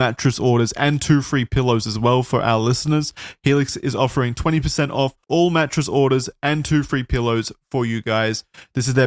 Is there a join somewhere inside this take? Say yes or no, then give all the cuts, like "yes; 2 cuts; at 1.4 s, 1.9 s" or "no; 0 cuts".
yes; 1 cut; at 5.2 s